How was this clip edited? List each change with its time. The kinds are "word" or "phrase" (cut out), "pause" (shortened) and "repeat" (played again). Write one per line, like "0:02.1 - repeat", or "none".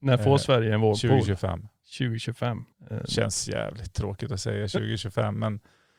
0:02.7 - pause